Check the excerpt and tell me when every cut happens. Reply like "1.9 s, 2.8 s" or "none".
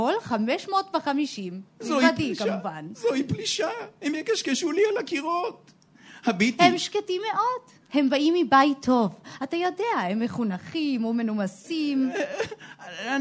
none